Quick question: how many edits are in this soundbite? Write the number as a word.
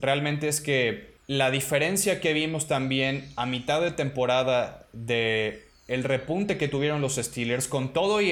one